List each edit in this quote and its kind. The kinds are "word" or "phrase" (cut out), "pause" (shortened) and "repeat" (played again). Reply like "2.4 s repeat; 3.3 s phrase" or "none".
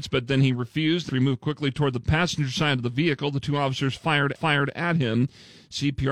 1.1 s word; 4.4 s repeat